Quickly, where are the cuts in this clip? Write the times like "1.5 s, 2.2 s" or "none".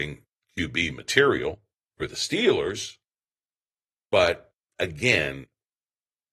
none